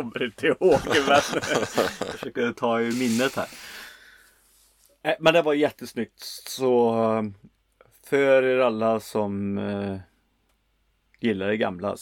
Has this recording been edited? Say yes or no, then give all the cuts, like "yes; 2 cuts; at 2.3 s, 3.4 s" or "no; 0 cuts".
no; 0 cuts